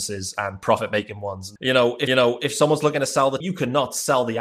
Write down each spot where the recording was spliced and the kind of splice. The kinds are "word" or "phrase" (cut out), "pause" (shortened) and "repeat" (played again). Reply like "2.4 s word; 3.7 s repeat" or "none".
1.6 s word; 2.1 s repeat; 3.4 s word